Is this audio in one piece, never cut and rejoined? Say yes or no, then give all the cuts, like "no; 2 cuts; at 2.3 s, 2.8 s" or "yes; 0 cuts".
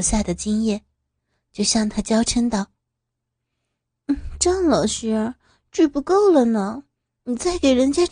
yes; 0 cuts